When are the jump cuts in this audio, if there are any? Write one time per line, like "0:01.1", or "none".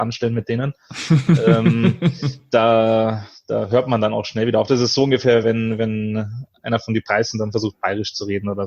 none